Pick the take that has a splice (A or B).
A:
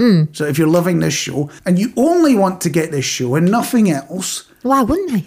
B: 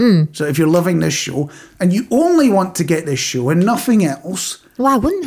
A